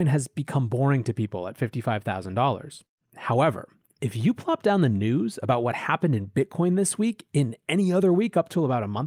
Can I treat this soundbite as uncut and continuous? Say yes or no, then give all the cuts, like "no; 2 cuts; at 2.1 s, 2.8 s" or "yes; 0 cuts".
yes; 0 cuts